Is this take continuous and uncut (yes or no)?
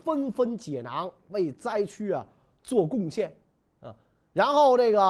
yes